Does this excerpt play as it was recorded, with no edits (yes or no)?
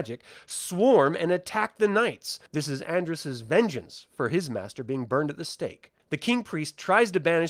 no